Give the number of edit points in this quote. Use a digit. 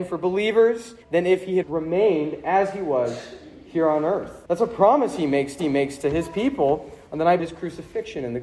5